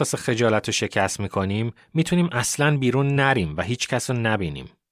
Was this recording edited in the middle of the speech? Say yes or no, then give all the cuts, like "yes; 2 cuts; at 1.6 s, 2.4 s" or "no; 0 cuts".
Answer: no; 0 cuts